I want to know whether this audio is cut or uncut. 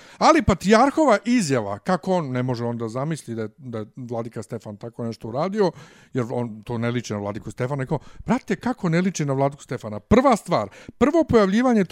uncut